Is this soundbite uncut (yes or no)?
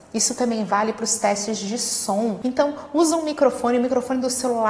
yes